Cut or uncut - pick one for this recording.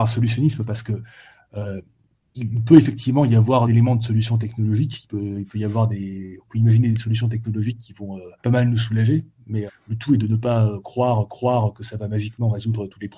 cut